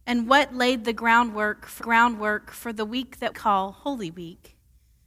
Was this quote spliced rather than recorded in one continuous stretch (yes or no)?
yes